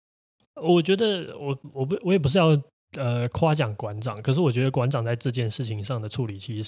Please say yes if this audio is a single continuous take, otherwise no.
yes